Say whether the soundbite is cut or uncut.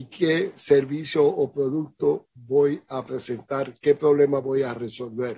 uncut